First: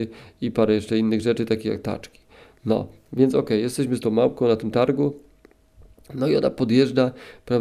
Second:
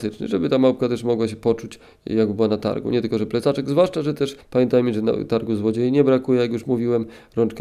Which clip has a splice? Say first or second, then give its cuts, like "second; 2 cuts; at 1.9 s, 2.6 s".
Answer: second; 1 cut; at 4.4 s